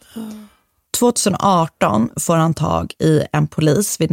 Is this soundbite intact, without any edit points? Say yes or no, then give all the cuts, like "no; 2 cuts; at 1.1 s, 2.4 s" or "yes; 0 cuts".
yes; 0 cuts